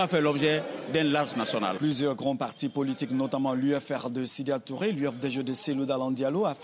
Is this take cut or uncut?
cut